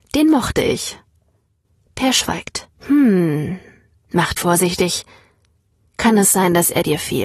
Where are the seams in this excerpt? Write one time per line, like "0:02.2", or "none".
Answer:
0:02.7
0:04.4